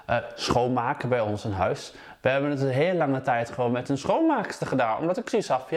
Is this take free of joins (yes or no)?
yes